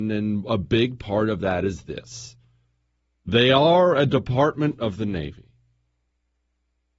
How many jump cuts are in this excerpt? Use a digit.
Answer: 0